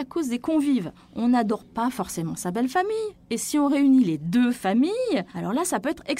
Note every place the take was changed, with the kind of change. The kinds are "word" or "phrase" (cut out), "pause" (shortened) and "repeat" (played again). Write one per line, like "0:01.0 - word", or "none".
none